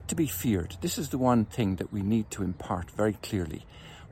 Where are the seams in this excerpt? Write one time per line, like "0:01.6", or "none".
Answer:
none